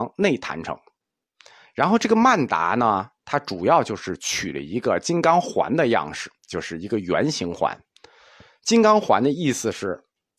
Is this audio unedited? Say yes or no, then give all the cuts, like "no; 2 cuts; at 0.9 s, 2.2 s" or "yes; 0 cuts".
no; 1 cut; at 6.4 s